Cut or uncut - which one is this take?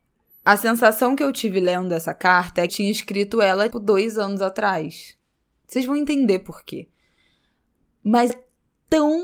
cut